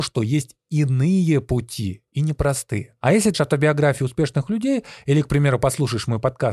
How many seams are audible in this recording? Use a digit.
1